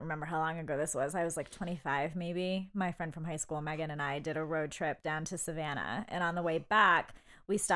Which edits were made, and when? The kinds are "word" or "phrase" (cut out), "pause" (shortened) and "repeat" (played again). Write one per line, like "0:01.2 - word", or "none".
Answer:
none